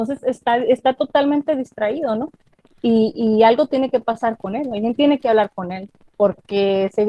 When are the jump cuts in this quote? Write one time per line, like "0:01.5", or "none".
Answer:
none